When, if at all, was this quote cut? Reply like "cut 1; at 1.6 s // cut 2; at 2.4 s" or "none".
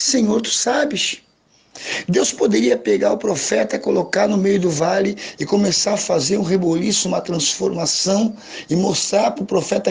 none